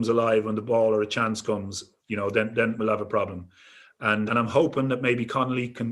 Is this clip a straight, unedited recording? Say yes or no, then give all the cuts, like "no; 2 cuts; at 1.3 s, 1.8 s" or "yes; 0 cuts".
no; 3 cuts; at 2.0 s, 2.8 s, 4.3 s